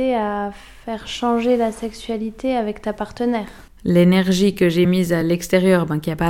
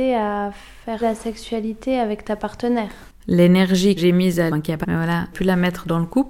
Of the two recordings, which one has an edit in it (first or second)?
second